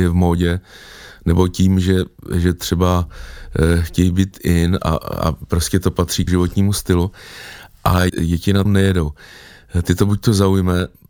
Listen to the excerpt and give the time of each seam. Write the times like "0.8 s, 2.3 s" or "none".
6.3 s, 8.1 s, 8.7 s